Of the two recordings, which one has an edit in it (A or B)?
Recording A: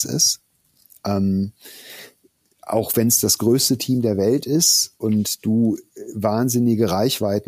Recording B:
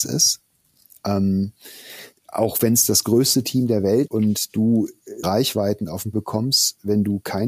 B